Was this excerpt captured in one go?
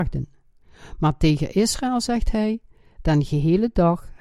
yes; 0 cuts

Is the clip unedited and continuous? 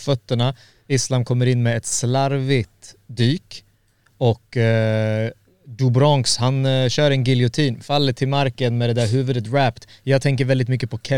yes; 0 cuts

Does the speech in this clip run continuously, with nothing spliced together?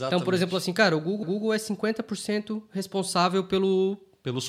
no; 1 cut; at 1.2 s

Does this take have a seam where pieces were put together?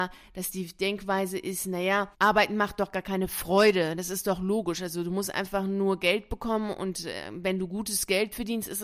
yes; 1 cut; at 2.1 s

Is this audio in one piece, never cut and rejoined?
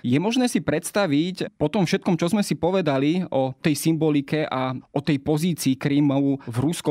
yes; 0 cuts

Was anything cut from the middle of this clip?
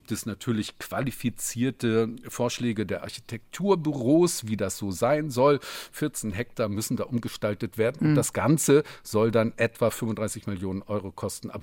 no; 0 cuts

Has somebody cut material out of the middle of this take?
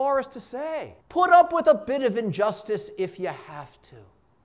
yes; 1 cut; at 1.0 s

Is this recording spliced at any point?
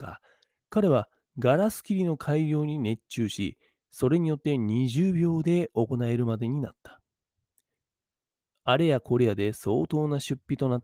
no; 0 cuts

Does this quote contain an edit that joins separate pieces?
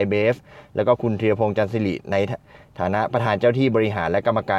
no; 0 cuts

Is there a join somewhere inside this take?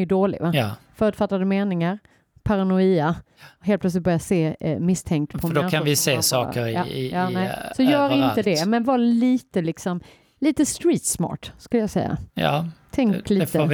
no; 0 cuts

